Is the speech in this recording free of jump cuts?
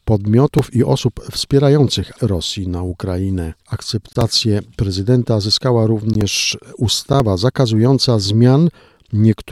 no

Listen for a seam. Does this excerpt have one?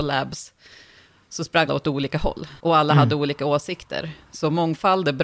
yes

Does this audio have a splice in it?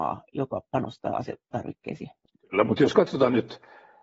no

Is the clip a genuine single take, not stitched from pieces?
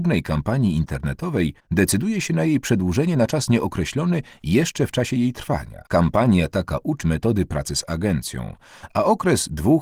no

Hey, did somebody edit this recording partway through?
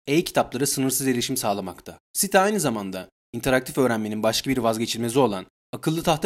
no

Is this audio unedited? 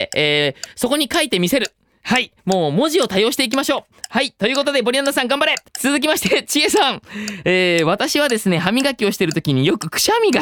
no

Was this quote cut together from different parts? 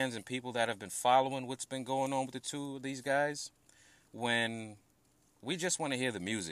no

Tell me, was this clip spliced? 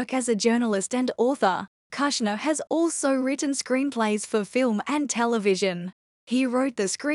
no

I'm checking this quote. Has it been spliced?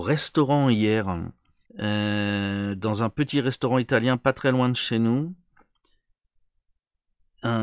yes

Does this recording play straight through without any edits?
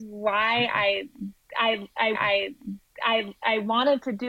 no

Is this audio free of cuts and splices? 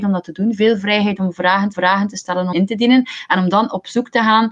no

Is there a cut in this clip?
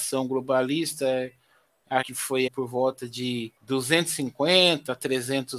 yes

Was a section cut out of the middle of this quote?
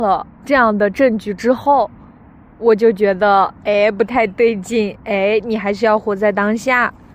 no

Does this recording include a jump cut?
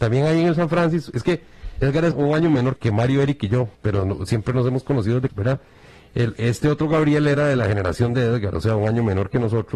yes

